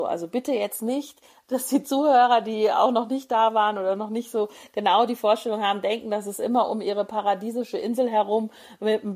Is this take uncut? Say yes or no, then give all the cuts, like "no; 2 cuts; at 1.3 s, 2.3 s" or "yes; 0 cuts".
yes; 0 cuts